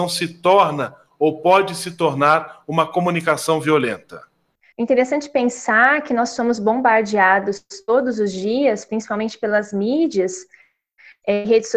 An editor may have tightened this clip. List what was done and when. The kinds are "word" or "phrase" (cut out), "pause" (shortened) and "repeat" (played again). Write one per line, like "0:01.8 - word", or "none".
none